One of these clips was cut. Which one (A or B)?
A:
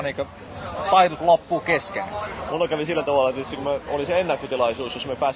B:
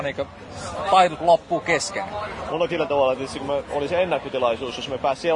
B